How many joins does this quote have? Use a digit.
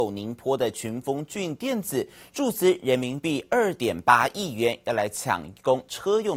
0